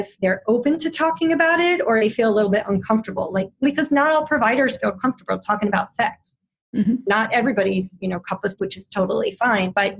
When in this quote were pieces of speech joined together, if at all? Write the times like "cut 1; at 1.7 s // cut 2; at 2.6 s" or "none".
cut 1; at 2.0 s // cut 2; at 3.6 s // cut 3; at 8.6 s